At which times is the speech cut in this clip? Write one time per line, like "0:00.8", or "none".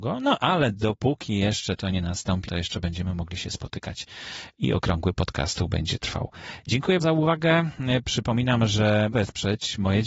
0:02.5
0:07.0
0:09.1